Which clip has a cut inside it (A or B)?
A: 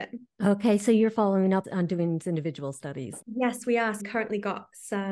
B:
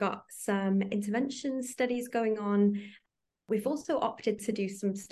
A